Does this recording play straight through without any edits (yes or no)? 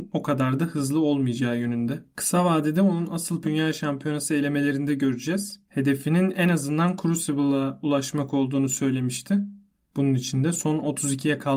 no